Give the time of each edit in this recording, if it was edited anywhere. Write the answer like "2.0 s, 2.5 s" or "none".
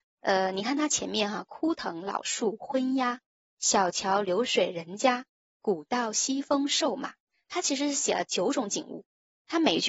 none